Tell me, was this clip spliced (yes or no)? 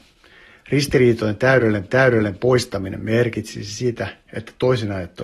yes